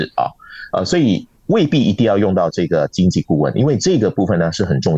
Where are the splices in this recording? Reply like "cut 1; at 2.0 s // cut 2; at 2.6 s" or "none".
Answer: cut 1; at 1.4 s